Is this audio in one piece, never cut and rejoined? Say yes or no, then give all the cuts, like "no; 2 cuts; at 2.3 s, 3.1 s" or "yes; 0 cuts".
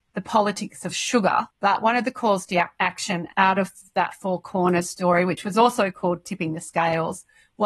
yes; 0 cuts